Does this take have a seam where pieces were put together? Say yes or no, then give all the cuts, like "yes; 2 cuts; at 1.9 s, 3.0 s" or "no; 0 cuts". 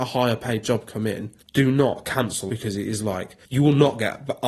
yes; 3 cuts; at 1.4 s, 2.5 s, 3.4 s